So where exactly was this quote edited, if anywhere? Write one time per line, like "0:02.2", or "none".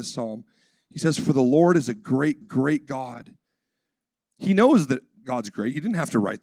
0:02.4